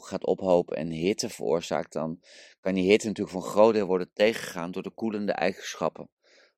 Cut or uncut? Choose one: uncut